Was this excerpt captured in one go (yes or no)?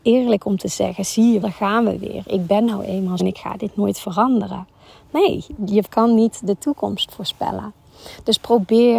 no